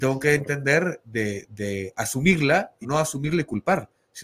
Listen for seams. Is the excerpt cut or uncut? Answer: cut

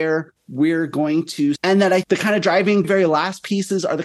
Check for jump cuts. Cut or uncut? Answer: cut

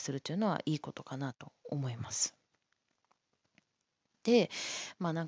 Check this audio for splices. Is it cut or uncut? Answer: uncut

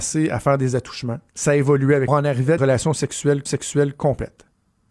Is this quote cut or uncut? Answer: cut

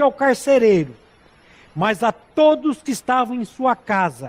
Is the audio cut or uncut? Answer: uncut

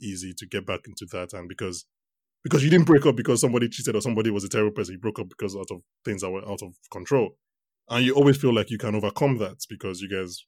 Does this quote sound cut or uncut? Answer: uncut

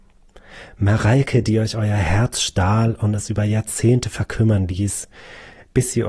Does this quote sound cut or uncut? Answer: uncut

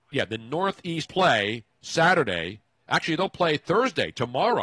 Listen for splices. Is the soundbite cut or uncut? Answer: cut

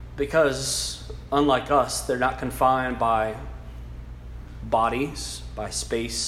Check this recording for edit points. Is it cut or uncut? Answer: uncut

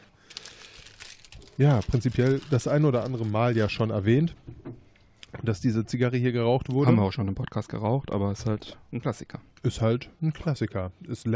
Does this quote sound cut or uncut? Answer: uncut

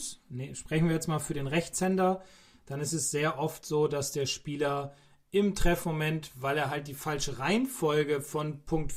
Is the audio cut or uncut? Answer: uncut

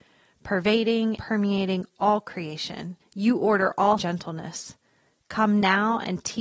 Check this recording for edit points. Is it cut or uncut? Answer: cut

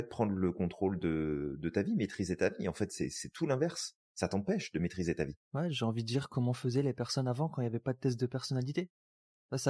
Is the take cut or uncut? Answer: cut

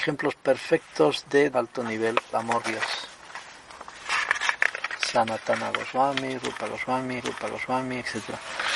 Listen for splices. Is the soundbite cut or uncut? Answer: cut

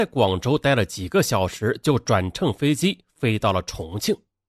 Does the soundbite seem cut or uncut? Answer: uncut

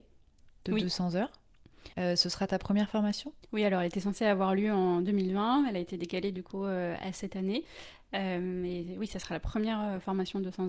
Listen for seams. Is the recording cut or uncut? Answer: cut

